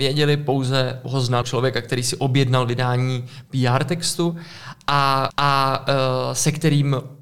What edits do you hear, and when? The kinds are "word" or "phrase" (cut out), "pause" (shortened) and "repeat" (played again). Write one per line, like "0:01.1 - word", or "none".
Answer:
0:01.4 - word
0:05.3 - repeat